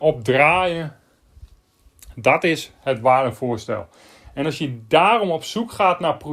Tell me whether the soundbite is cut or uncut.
uncut